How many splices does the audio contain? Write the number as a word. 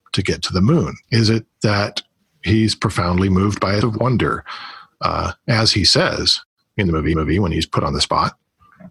four